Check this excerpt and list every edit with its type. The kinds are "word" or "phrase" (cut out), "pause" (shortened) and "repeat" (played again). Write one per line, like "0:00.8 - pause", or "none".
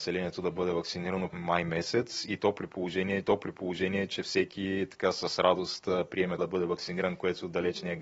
0:01.3 - word
0:03.2 - repeat
0:06.4 - word